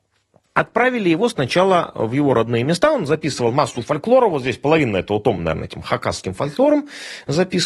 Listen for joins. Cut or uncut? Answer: uncut